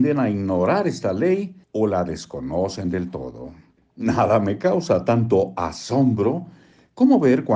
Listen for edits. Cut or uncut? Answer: cut